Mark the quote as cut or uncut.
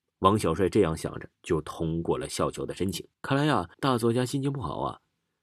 cut